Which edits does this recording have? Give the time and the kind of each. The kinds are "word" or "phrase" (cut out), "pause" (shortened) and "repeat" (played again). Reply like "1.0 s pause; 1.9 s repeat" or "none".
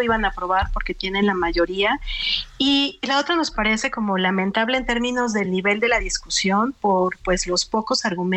none